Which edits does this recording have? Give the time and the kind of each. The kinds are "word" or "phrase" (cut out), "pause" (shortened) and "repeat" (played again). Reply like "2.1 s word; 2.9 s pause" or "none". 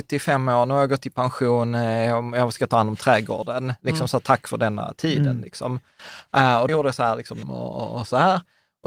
6.7 s word; 7.4 s word